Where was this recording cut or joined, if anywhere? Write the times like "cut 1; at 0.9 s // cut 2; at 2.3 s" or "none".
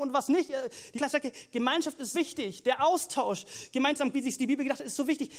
cut 1; at 0.9 s // cut 2; at 2.1 s // cut 3; at 4.1 s